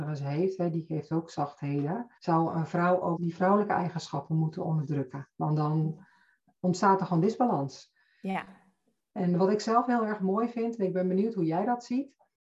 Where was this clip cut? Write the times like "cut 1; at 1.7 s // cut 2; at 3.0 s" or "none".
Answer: cut 1; at 2.2 s // cut 2; at 3.2 s